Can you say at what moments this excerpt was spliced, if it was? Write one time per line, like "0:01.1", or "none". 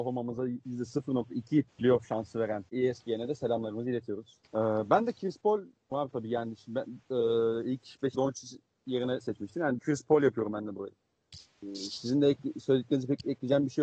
0:01.7
0:02.7
0:04.4
0:05.9
0:08.1
0:09.2
0:09.8